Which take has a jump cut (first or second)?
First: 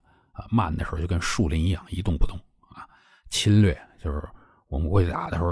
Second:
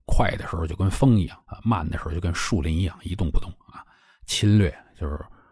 second